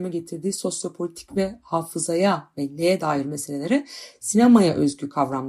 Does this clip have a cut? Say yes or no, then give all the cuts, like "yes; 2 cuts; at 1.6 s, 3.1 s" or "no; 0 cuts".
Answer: no; 0 cuts